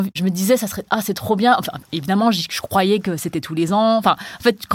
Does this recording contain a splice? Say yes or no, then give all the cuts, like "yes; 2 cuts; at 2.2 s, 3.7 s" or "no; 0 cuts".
no; 0 cuts